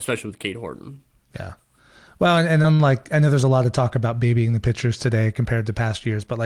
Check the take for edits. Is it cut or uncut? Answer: uncut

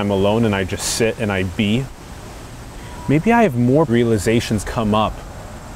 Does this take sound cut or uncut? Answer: cut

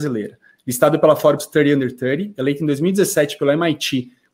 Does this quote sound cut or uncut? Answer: uncut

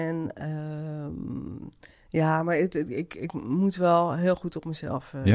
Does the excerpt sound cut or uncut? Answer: uncut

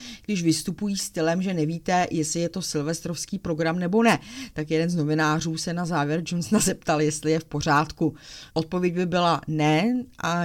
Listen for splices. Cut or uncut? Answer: cut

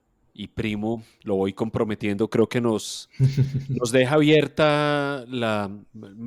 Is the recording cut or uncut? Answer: uncut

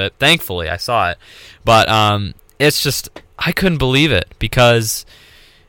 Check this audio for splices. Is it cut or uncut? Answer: uncut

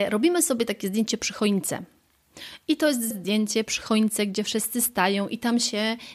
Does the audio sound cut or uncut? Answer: cut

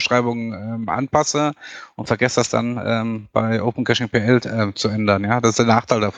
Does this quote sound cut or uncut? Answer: uncut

